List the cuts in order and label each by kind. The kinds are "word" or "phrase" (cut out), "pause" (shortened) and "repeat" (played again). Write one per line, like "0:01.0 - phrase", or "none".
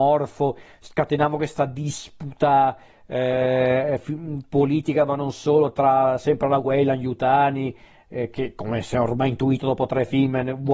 none